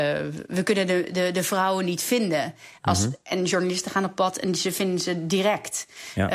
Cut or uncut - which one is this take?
uncut